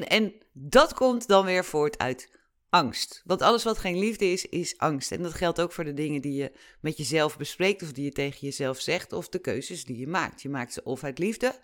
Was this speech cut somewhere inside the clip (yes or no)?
no